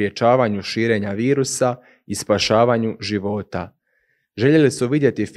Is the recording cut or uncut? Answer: uncut